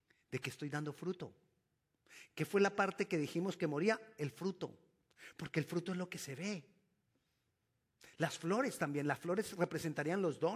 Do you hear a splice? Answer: no; 0 cuts

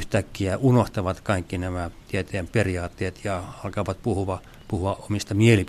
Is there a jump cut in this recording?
no; 0 cuts

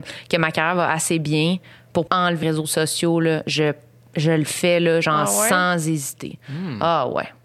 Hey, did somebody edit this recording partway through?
yes; 2 cuts; at 2.1 s, 2.4 s

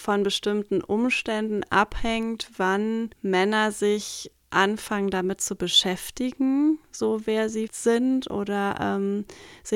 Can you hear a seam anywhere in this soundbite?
yes; 2 cuts; at 3.1 s, 7.7 s

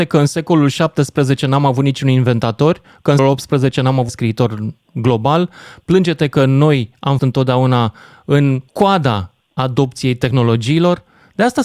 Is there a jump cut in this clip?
yes; 4 cuts; at 3.2 s, 4.1 s, 7.2 s, 8.7 s

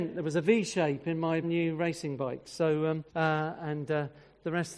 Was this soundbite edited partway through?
yes; 2 cuts; at 1.4 s, 3.1 s

